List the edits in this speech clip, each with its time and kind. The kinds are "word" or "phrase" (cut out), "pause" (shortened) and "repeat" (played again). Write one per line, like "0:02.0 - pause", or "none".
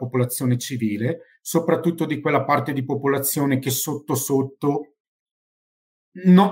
none